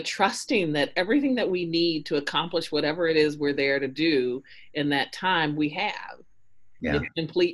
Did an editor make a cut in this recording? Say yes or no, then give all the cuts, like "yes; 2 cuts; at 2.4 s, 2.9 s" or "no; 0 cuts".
no; 0 cuts